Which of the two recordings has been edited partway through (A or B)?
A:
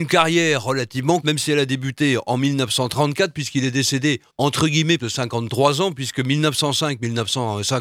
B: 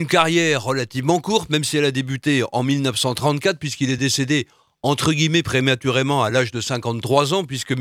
A